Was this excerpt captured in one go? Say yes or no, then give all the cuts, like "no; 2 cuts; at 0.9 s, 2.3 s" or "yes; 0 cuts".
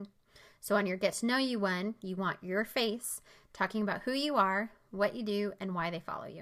yes; 0 cuts